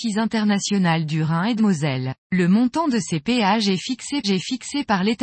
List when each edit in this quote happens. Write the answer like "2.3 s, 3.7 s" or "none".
1.6 s, 2.2 s, 4.2 s